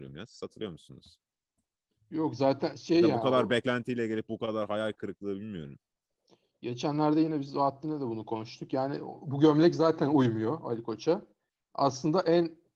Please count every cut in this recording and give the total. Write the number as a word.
zero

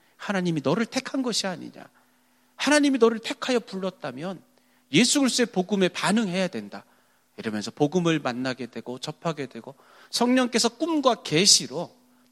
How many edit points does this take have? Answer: zero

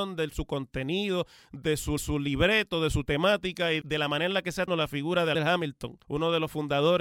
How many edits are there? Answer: five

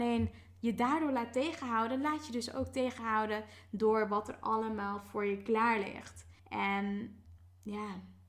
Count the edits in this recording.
one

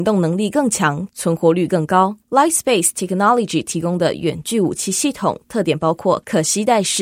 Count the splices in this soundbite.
one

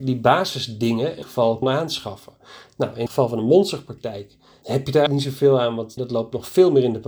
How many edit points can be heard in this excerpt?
six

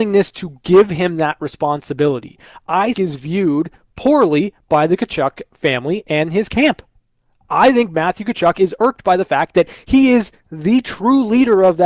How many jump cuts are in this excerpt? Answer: one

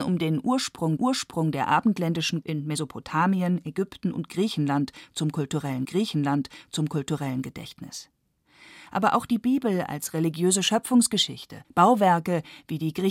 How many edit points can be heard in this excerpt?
four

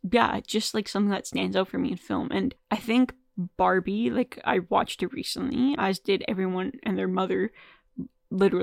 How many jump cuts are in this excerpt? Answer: two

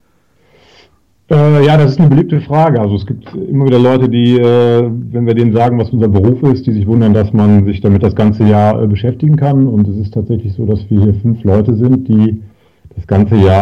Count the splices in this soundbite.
one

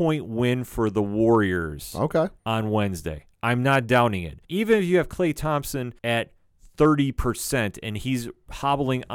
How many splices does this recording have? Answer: three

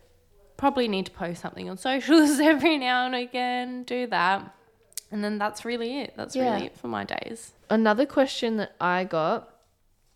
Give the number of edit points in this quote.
one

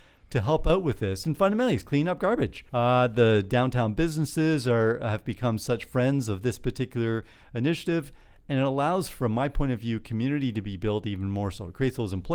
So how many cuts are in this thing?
one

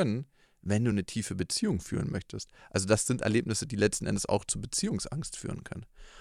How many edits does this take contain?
zero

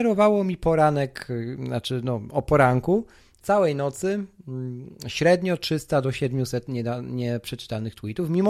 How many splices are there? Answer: one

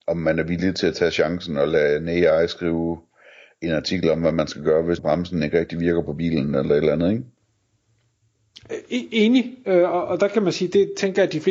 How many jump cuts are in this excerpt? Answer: one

